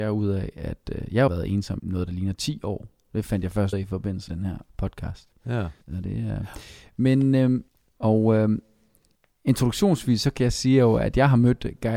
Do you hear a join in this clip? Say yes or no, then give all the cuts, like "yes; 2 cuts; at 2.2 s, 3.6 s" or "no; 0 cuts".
yes; 8 cuts; at 1.3 s, 1.8 s, 3.7 s, 4.3 s, 4.7 s, 5.8 s, 7.7 s, 9.2 s